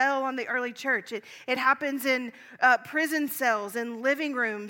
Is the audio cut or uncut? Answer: uncut